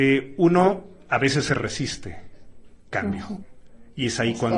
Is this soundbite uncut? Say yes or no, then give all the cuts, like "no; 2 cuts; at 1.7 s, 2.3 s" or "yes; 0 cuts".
no; 1 cut; at 2.9 s